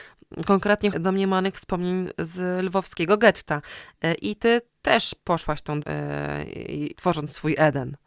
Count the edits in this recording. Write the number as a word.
three